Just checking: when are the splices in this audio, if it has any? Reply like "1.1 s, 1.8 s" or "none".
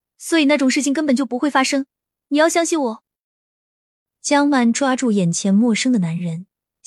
none